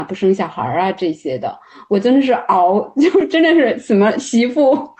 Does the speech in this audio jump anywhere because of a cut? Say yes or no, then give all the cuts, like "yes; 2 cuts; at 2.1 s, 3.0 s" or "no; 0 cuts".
no; 0 cuts